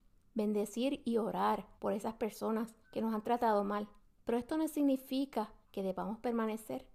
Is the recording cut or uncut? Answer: cut